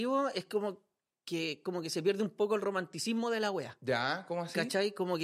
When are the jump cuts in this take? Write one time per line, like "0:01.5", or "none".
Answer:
none